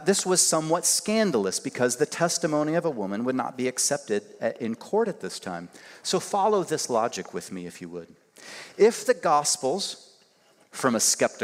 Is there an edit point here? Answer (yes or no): no